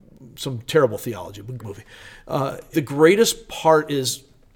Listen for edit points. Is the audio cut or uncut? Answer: cut